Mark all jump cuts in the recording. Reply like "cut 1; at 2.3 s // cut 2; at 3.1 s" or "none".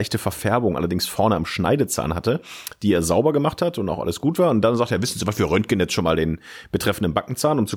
none